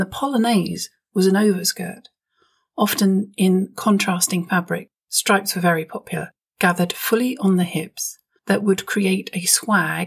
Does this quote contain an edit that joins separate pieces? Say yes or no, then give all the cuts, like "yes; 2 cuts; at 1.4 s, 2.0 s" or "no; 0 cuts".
no; 0 cuts